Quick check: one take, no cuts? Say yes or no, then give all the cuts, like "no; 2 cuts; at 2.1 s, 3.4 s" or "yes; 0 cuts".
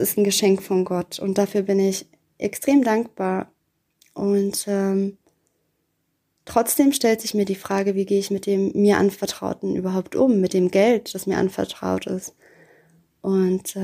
yes; 0 cuts